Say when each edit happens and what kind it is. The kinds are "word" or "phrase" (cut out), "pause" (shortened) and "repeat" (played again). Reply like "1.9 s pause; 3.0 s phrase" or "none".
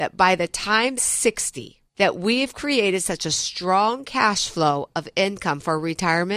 1.0 s phrase; 1.9 s pause